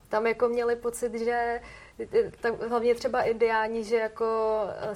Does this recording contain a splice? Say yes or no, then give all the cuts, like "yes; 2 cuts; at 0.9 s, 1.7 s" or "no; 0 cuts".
no; 0 cuts